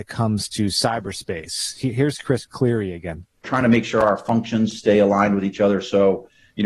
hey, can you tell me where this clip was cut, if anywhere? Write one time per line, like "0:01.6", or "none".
none